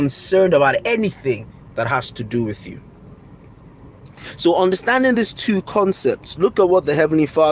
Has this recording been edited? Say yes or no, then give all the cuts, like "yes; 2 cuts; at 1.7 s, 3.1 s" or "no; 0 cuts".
no; 0 cuts